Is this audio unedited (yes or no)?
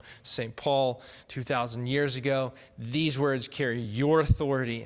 yes